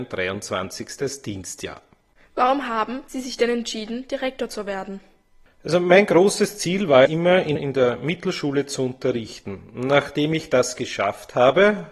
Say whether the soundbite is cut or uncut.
cut